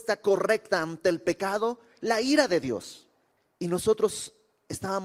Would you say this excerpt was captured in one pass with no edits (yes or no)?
yes